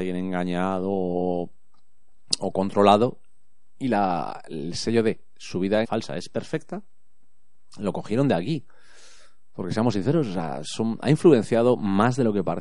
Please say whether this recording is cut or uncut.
cut